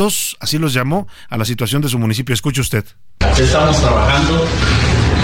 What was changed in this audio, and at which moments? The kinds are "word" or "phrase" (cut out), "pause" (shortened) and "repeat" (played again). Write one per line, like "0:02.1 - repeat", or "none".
none